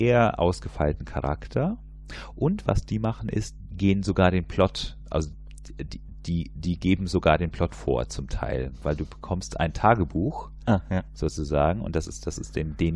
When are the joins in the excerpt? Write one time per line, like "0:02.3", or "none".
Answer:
0:03.7